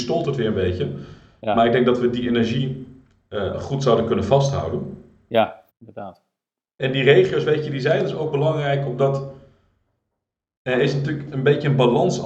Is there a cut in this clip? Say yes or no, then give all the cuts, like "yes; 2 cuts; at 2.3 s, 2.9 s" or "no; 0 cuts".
yes; 1 cut; at 5.7 s